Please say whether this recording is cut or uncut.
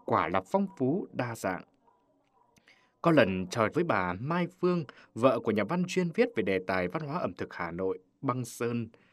cut